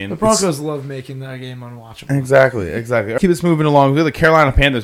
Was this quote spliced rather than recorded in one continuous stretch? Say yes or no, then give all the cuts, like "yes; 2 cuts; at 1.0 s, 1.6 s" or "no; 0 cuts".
yes; 1 cut; at 3.2 s